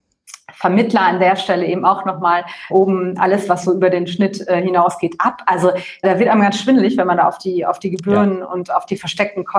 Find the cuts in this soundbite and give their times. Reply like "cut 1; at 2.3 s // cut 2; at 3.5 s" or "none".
cut 1; at 2.7 s // cut 2; at 6.0 s